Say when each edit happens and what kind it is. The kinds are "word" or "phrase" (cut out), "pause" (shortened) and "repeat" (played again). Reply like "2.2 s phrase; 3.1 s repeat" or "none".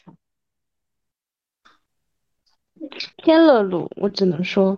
3.1 s pause